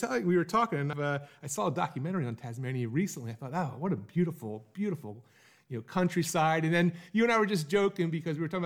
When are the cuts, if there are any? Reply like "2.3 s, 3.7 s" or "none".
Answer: 0.9 s